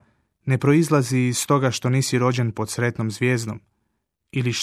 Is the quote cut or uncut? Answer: uncut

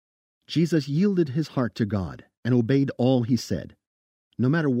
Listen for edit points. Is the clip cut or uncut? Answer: uncut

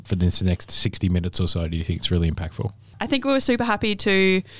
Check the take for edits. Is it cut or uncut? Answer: uncut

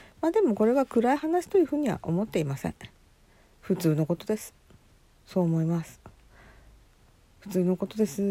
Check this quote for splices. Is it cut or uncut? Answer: uncut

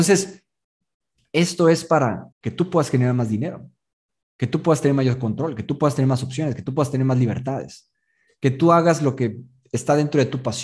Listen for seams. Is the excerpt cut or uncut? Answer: cut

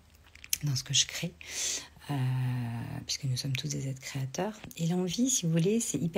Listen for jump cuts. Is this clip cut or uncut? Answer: uncut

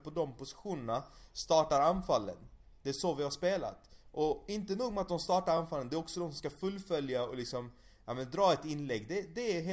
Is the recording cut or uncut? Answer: uncut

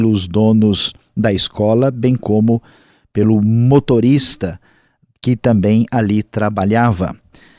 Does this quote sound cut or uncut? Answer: uncut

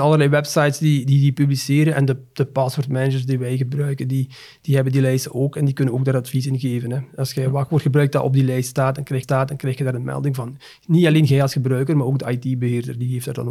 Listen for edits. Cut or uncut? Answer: cut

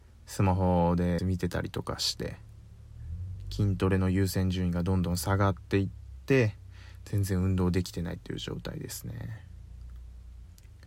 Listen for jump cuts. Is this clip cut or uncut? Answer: cut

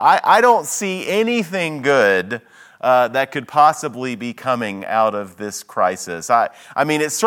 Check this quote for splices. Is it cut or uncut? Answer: uncut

